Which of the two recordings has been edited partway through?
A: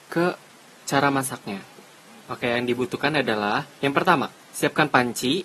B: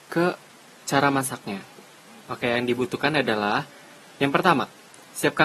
A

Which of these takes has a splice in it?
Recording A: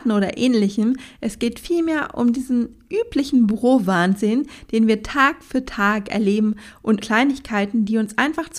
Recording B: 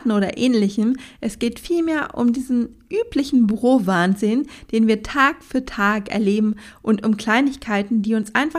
A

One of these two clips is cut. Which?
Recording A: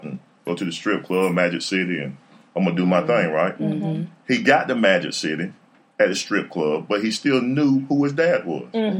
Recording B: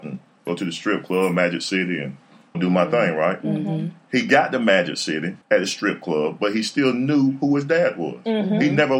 B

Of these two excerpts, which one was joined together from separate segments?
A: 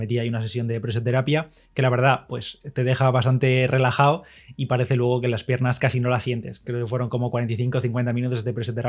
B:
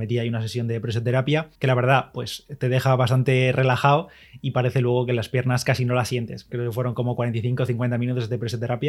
B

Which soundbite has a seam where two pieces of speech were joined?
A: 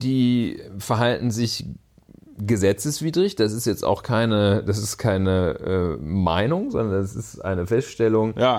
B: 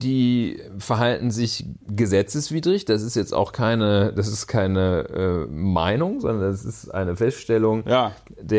B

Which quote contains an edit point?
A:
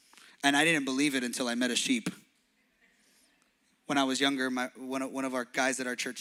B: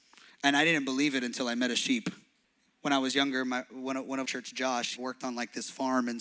B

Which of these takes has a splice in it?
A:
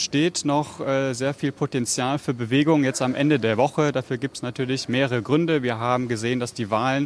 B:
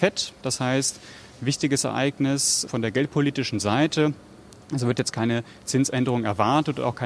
B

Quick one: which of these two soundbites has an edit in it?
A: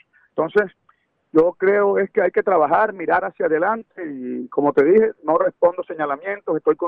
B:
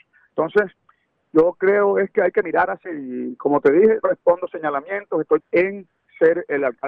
B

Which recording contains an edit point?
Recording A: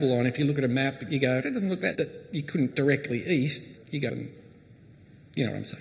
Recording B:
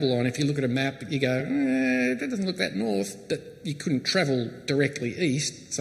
A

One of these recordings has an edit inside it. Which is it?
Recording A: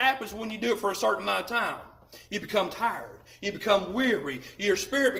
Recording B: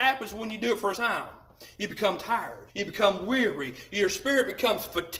B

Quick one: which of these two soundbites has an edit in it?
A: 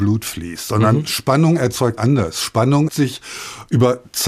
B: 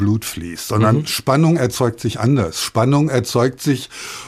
A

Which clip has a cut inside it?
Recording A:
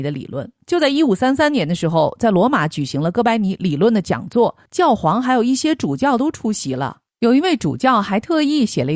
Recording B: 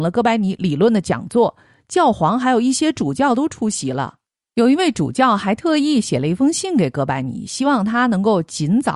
A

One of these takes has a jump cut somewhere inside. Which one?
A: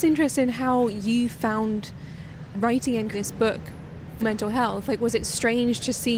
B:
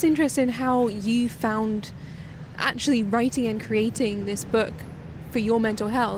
A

